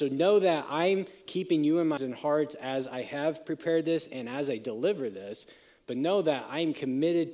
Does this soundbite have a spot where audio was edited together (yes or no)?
yes